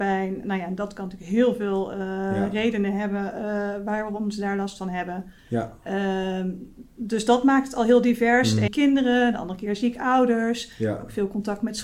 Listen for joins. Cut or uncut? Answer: cut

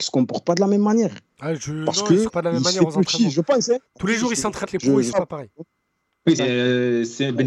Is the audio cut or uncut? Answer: cut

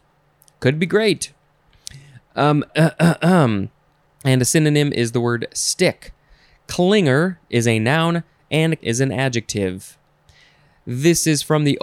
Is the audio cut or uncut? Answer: cut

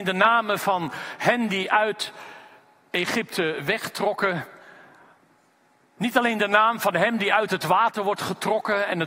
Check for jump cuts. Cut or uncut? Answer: uncut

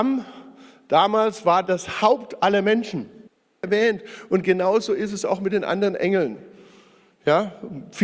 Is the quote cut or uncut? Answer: cut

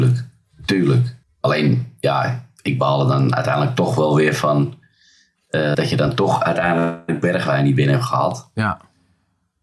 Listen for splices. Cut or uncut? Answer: cut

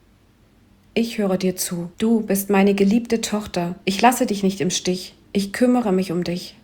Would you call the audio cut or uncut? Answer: cut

